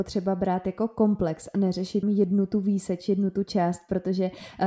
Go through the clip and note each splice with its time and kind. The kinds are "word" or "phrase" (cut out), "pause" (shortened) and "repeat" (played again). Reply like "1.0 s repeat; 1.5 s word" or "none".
2.0 s word